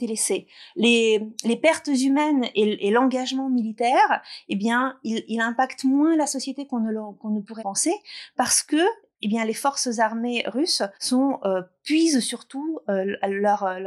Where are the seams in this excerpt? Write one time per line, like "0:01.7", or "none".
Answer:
0:07.6
0:10.9